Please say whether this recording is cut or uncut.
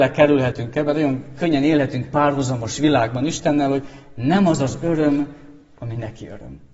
uncut